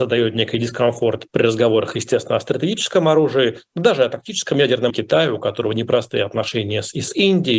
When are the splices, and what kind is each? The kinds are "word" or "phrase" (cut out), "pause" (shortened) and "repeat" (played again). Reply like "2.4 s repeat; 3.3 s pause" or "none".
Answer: 1.3 s word; 4.9 s word